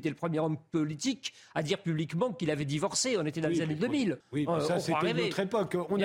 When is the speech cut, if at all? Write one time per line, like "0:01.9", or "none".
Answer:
0:04.2